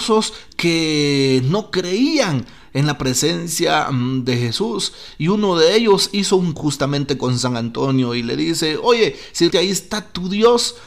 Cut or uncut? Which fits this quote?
cut